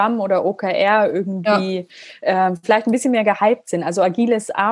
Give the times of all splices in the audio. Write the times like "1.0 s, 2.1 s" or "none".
none